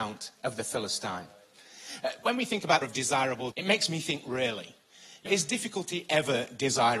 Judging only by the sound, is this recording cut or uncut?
cut